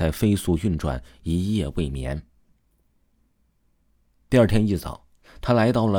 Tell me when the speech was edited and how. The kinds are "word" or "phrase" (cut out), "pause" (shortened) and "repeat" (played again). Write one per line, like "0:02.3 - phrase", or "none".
none

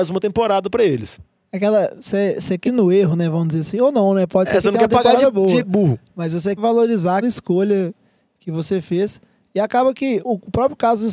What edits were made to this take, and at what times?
0:02.6 - word
0:06.6 - word
0:07.2 - word
0:10.2 - word

